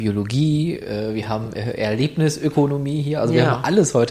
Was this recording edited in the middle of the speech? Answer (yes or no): no